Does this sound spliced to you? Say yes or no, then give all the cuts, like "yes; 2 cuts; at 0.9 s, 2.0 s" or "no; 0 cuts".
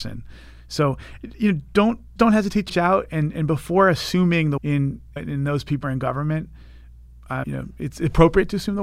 yes; 6 cuts; at 2.2 s, 2.7 s, 4.6 s, 5.2 s, 5.8 s, 7.4 s